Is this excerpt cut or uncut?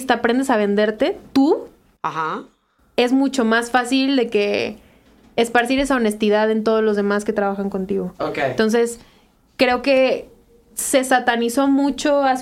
uncut